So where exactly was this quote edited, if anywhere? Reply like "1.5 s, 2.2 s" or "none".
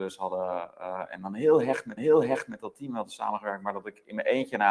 2.0 s